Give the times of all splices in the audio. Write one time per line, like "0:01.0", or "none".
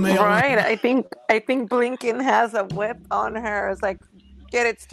none